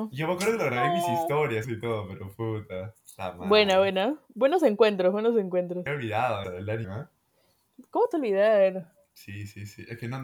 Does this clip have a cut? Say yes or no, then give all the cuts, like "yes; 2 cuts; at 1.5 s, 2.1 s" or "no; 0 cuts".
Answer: yes; 5 cuts; at 1.6 s, 5.9 s, 6.4 s, 6.8 s, 8.1 s